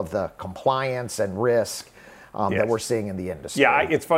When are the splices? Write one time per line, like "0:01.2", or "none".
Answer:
none